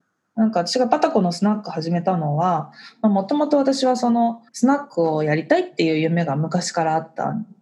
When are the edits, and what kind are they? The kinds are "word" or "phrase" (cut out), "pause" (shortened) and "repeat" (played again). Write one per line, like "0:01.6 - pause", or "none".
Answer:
0:04.5 - pause